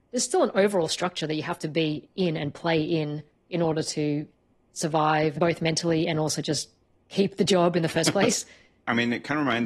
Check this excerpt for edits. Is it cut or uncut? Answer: uncut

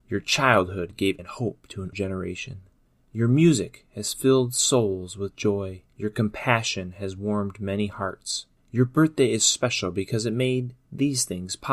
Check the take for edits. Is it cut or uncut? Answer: cut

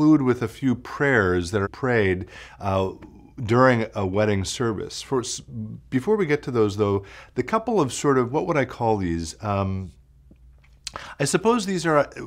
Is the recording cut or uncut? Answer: cut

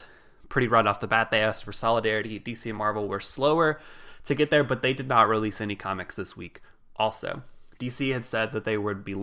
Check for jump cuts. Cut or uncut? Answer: uncut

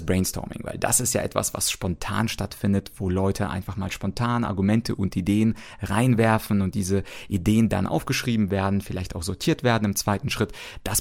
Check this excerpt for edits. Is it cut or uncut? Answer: uncut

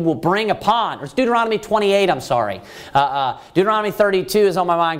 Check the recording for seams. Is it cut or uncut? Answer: uncut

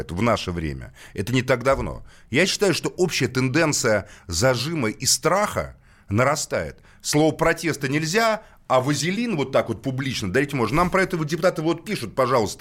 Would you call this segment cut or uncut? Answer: uncut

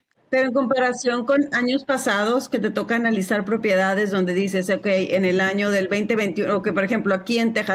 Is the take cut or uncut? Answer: uncut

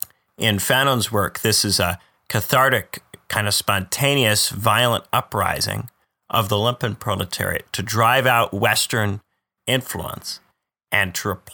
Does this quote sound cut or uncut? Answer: uncut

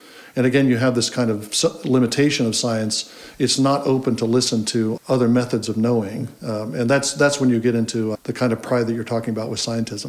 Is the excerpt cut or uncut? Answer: cut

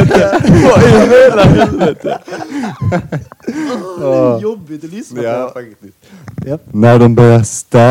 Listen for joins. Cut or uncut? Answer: uncut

